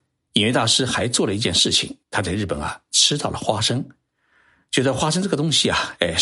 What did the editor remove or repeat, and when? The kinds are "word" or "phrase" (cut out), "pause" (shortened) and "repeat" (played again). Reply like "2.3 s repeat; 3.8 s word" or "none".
2.0 s pause